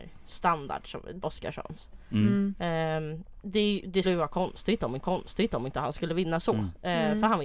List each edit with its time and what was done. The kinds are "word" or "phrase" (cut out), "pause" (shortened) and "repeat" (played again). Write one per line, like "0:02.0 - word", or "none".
0:01.2 - word
0:03.4 - pause
0:04.0 - word
0:05.0 - repeat